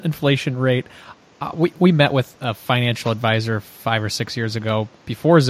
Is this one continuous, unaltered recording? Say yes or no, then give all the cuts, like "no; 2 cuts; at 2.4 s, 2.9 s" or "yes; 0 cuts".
yes; 0 cuts